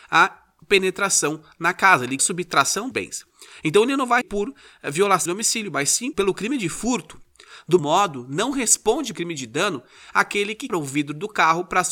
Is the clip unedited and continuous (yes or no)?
no